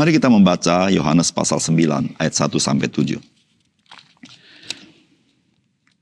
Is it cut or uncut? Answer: uncut